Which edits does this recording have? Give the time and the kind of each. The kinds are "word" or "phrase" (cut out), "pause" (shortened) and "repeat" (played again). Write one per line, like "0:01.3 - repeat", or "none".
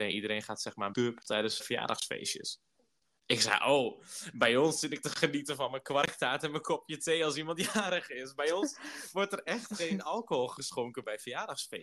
0:00.9 - phrase
0:01.6 - word